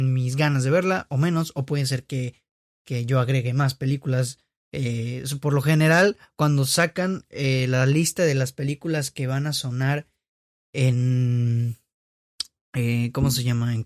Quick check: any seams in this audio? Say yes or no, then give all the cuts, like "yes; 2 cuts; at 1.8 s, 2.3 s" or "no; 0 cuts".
no; 0 cuts